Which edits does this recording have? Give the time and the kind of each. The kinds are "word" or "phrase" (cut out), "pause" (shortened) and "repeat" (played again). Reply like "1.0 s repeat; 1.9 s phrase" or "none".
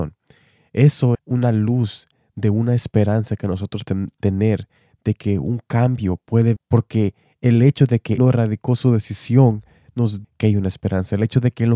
1.1 s word; 3.8 s word; 6.6 s word; 8.2 s word; 10.2 s word